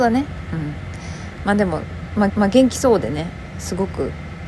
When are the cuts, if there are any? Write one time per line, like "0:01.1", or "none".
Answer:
0:02.3